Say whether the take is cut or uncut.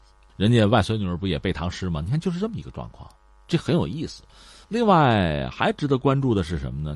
uncut